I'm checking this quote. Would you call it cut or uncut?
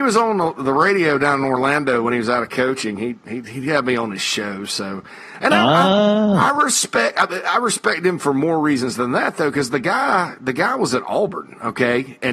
uncut